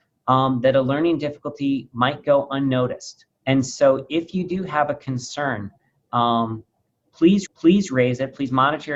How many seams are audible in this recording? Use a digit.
2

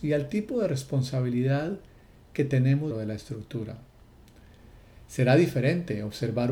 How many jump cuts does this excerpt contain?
1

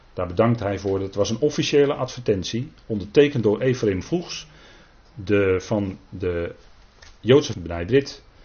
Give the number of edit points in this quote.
1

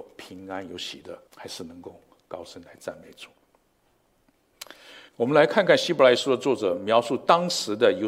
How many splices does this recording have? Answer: 2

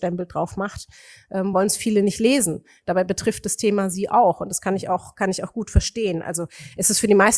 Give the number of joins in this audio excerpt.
0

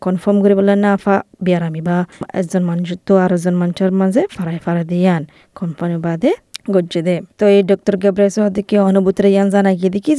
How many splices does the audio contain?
1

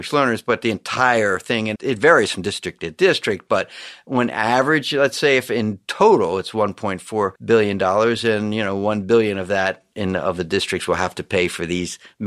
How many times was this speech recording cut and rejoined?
2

